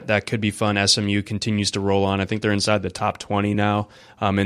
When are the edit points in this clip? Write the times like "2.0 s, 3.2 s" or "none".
none